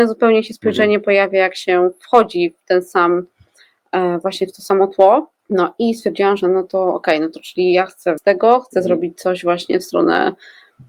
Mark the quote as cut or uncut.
cut